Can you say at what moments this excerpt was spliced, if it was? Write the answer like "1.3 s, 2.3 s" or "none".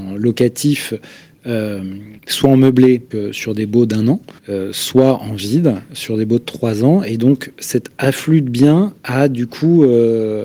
2.2 s, 3.1 s, 4.4 s, 9.0 s